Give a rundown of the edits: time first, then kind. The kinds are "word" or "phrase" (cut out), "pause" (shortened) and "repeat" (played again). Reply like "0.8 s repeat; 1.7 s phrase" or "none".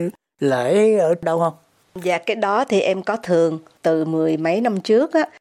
none